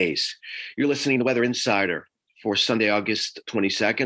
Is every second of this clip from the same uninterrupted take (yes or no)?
yes